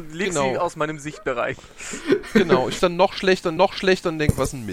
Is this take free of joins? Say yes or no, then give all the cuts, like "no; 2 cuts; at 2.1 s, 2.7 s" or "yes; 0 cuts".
no; 2 cuts; at 2.8 s, 3.6 s